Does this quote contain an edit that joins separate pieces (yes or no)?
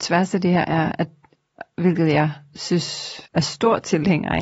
yes